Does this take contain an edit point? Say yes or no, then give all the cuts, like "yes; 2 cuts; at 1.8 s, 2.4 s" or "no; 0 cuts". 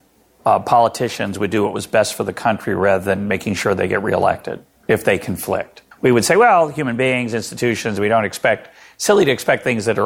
yes; 1 cut; at 5.9 s